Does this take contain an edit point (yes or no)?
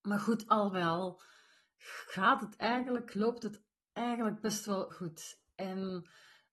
yes